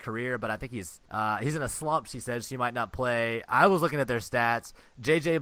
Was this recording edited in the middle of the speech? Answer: yes; 1 cut; at 1.0 s

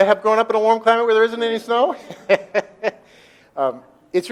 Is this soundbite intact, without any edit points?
yes; 0 cuts

